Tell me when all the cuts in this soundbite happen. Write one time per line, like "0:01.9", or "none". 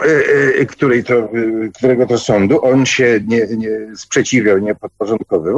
none